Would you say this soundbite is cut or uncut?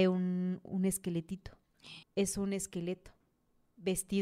cut